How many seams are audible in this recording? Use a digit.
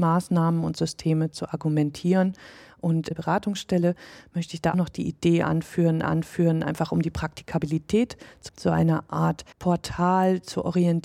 5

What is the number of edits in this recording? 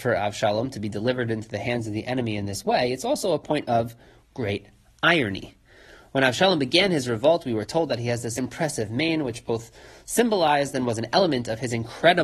1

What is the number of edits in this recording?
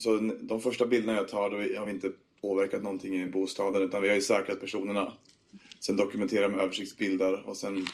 0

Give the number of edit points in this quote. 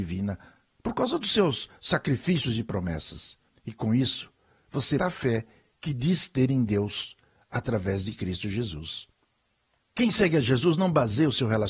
2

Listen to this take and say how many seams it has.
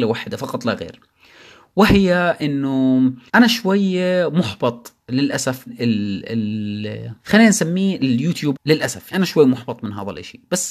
5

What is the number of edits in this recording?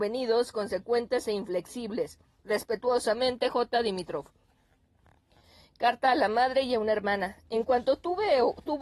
0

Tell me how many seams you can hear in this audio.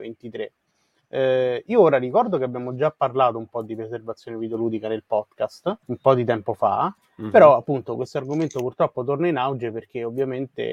2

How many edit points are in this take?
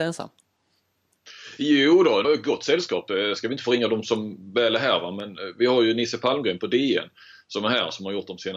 1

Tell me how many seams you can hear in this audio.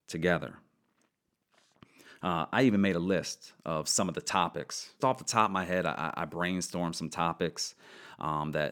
1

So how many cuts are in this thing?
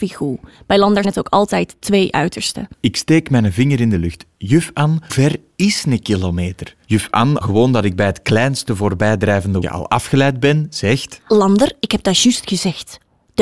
5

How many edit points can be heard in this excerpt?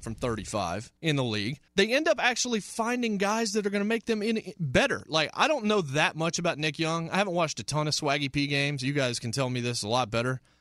2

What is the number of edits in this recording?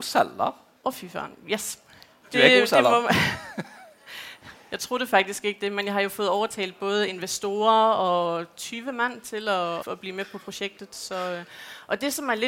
1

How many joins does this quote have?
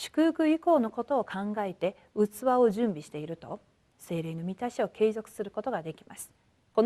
0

